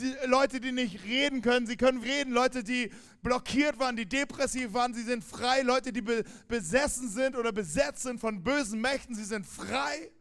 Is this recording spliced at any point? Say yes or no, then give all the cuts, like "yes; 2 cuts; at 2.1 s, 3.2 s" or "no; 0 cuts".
yes; 1 cut; at 2.0 s